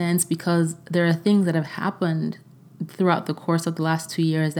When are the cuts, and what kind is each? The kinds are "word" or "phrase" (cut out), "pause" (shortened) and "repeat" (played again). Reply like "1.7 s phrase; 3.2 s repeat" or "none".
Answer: none